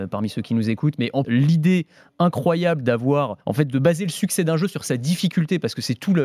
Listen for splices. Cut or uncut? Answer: cut